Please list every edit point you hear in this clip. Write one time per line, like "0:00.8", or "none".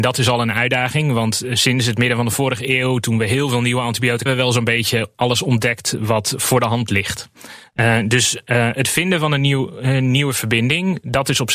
0:04.3
0:05.1